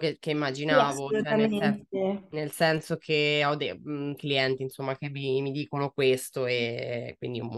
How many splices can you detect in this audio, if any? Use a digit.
1